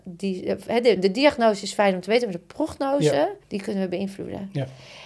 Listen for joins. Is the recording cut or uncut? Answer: cut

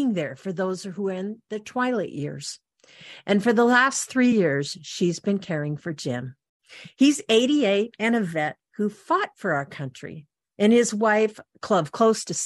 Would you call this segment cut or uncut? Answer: uncut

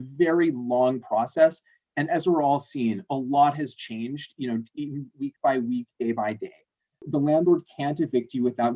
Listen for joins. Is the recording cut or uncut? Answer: uncut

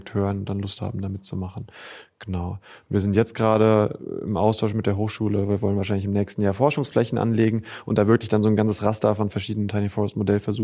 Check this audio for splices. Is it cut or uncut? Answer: uncut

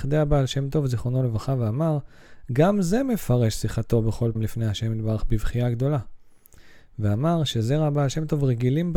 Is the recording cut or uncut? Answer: cut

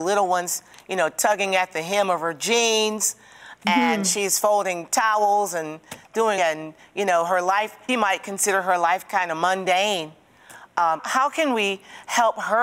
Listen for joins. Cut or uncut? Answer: cut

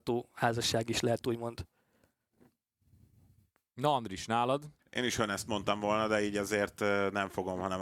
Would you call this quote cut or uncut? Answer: cut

